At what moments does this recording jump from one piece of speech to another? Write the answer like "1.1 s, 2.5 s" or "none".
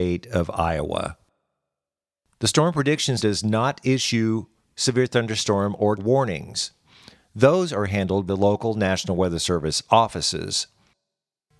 3.2 s, 6.0 s, 8.3 s